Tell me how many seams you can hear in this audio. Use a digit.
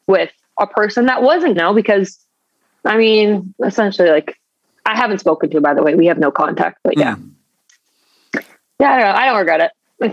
1